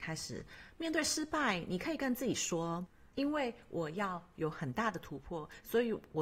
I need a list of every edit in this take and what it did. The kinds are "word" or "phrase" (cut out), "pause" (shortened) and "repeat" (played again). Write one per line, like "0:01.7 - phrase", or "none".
0:03.1 - pause